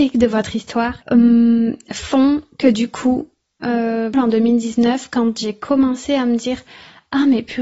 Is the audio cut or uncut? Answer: cut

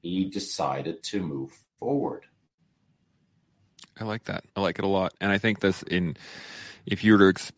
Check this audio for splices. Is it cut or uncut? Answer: cut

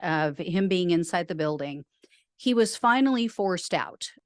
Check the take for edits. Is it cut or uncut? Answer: uncut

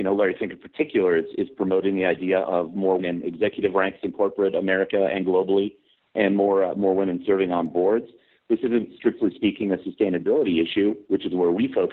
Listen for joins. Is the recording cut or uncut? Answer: cut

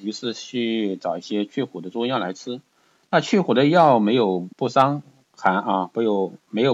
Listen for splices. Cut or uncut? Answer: cut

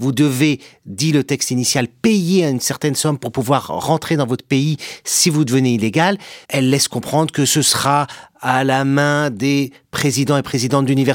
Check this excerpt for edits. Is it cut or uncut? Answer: cut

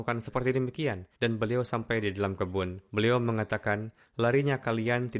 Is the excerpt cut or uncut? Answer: cut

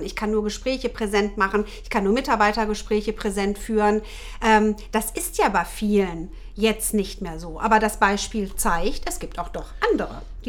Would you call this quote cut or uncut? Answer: uncut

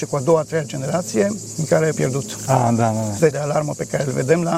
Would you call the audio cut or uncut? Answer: cut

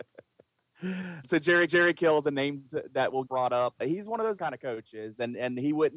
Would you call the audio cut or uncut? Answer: cut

